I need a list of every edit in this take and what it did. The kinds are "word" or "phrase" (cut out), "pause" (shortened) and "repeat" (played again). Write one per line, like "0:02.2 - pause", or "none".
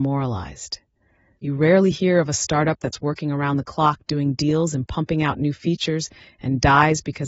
none

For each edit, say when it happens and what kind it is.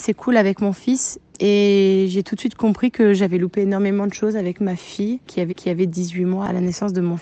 0:05.5 - repeat

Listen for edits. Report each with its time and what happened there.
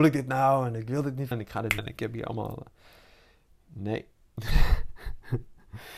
0:01.3 - word
0:01.8 - word

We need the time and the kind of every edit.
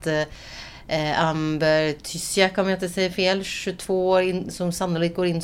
none

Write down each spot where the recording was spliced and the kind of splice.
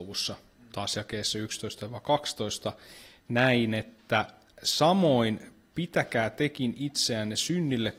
none

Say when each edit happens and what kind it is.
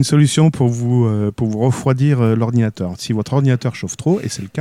none

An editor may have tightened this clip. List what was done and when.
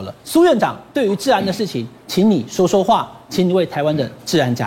0:02.0 - pause

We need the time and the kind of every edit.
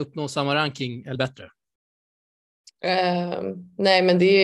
0:01.2 - word

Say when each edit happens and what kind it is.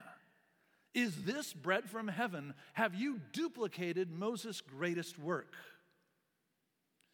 none

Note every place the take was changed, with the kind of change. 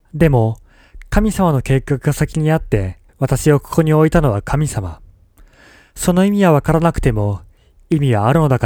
0:03.1 - pause

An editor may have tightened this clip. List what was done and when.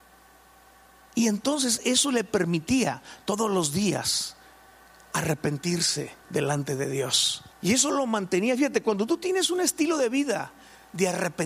0:06.2 - pause
0:07.5 - pause

